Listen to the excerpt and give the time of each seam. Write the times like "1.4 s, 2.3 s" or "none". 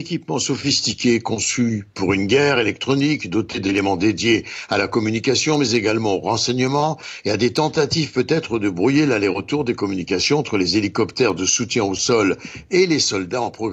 none